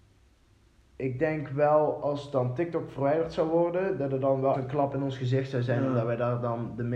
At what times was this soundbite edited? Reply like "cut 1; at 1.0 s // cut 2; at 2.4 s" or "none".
cut 1; at 4.5 s